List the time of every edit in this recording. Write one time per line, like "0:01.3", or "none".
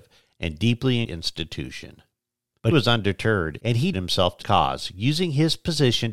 0:01.1
0:02.7
0:03.9
0:04.4